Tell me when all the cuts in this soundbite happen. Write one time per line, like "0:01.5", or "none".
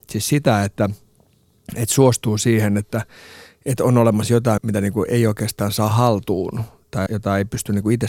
0:04.6
0:07.1